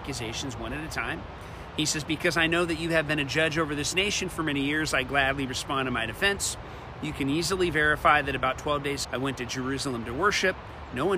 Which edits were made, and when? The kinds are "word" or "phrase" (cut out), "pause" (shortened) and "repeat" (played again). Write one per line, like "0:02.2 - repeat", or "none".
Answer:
0:09.0 - word